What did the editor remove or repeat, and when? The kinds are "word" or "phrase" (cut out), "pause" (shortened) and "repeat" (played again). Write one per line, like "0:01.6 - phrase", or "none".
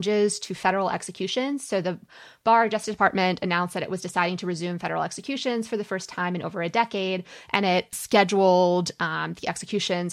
0:07.9 - word

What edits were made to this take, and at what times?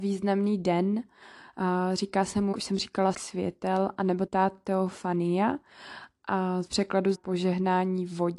0:02.5 - word
0:03.1 - word
0:04.3 - word
0:06.7 - word
0:07.1 - word

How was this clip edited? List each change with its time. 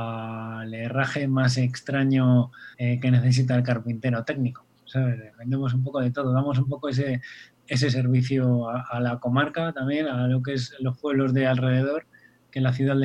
0:02.7 - pause

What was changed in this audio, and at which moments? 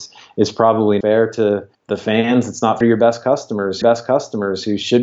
0:01.0 - word
0:01.7 - pause
0:02.8 - word
0:03.8 - repeat

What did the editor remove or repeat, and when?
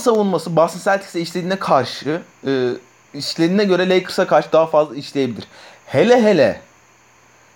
none

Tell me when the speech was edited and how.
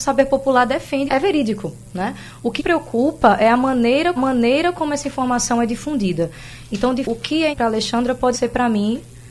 0:01.1 - word
0:02.6 - word
0:04.2 - repeat
0:07.0 - word
0:07.5 - word
0:08.3 - word

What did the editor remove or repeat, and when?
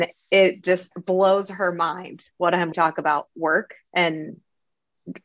0:00.9 - word
0:02.7 - phrase
0:03.9 - pause

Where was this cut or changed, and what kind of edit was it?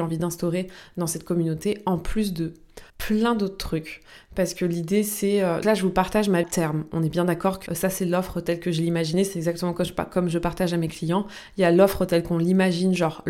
0:02.9 - pause
0:05.6 - word
0:06.4 - phrase
0:07.7 - word

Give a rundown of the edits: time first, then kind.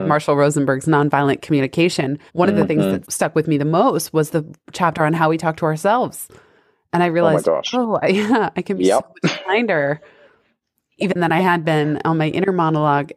0:02.3 - pause
0:03.0 - word
0:04.6 - pause

